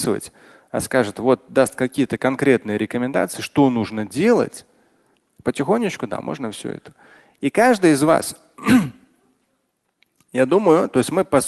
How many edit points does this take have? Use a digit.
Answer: 0